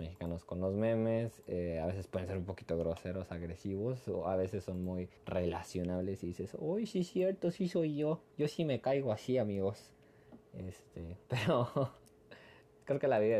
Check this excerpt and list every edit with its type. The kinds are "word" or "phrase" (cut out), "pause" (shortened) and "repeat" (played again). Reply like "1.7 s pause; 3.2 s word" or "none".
5.2 s pause; 8.3 s pause; 11.2 s pause